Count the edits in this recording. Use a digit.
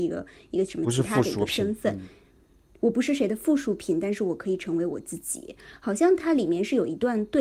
0